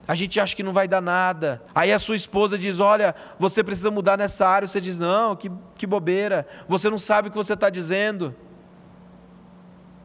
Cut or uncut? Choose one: cut